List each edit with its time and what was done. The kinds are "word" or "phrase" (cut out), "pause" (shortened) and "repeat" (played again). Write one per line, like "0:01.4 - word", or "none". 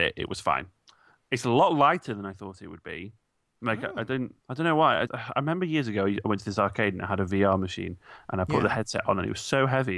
0:04.4 - pause
0:05.1 - word